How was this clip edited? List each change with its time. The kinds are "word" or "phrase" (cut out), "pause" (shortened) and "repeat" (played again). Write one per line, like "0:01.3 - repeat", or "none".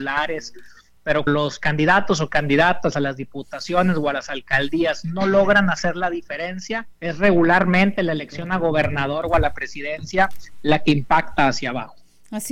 0:01.3 - word
0:07.0 - pause